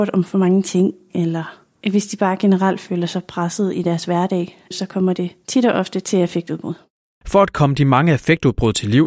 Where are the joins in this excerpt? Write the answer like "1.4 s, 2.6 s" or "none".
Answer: none